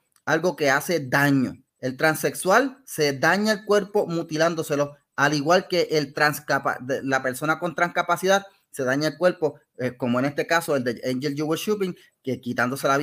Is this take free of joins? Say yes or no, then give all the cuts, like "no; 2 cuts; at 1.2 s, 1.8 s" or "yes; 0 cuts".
no; 1 cut; at 1.7 s